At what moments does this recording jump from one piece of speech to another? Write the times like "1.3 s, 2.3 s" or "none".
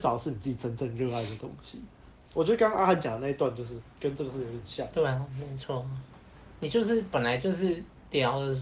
none